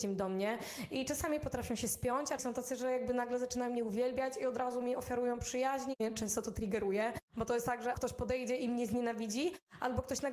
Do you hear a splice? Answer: yes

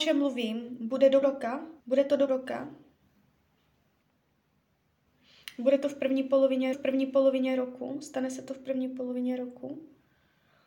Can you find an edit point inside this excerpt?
yes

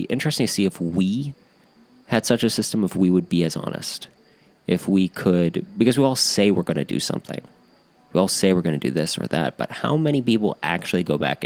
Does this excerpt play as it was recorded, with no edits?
yes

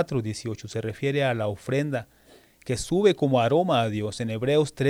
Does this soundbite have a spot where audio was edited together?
no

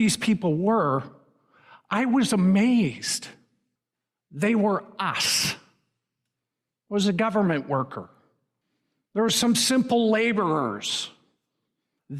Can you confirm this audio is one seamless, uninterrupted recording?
yes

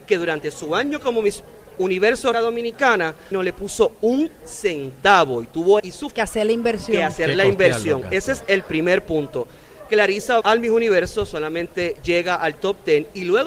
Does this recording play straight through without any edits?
no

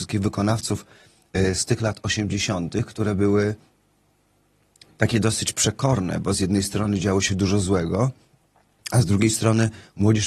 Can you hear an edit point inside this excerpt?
no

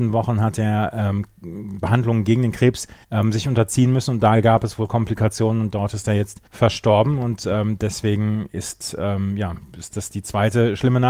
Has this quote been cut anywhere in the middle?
yes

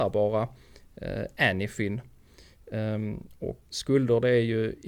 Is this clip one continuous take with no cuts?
no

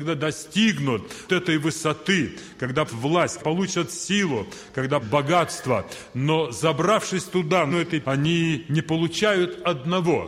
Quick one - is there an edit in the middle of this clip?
yes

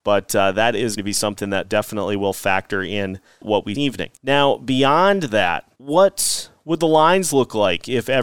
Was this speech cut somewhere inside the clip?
yes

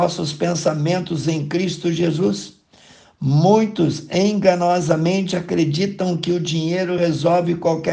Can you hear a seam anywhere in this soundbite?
no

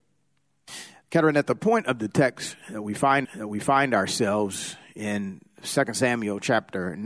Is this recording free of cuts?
no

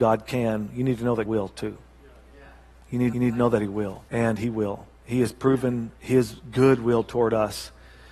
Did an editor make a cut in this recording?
yes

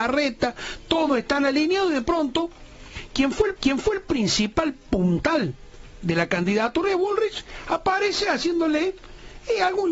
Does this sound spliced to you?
yes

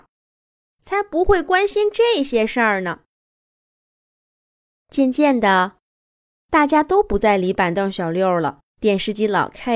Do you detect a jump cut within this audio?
yes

